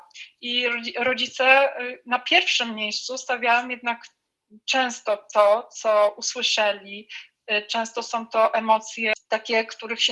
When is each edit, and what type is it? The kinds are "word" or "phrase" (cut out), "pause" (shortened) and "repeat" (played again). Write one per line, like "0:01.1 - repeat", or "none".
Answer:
none